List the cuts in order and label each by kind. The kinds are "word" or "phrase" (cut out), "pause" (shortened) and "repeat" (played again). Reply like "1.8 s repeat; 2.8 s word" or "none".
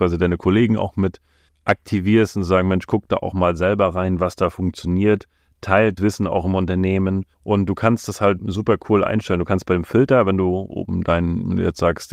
1.5 s word; 6.0 s word; 7.3 s pause; 8.4 s word